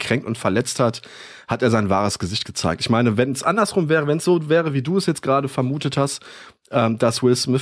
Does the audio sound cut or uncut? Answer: uncut